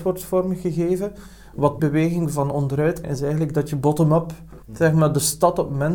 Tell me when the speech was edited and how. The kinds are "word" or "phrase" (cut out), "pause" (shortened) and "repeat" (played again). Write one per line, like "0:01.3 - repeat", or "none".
0:01.8 - word
0:03.0 - word
0:04.6 - pause